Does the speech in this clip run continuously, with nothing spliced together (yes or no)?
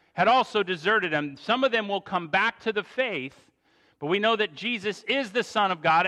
yes